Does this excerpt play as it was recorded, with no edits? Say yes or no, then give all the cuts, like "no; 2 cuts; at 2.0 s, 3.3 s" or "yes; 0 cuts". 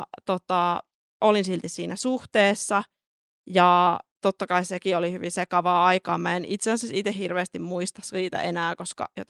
yes; 0 cuts